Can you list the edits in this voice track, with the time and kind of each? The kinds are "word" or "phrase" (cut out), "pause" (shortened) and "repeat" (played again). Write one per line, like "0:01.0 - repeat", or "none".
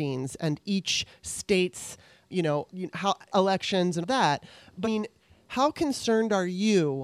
0:02.3 - word
0:02.7 - word
0:03.3 - word
0:04.0 - word
0:04.8 - word